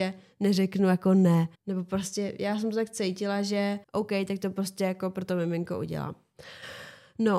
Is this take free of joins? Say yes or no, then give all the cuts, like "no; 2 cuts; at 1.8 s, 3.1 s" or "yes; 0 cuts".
no; 2 cuts; at 1.5 s, 3.8 s